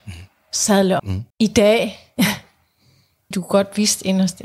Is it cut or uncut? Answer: cut